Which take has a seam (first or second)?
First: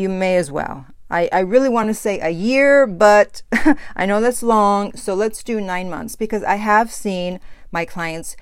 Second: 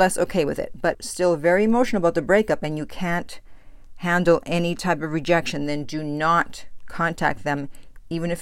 second